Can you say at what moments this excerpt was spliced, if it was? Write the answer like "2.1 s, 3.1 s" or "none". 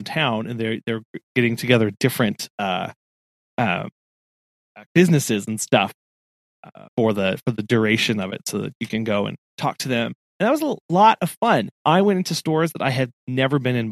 4.9 s, 6.9 s, 9.5 s, 11.8 s